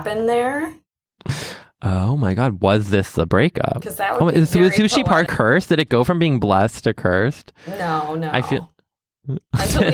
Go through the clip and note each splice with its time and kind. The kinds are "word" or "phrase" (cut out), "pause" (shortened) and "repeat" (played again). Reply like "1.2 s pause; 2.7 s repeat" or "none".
5.3 s word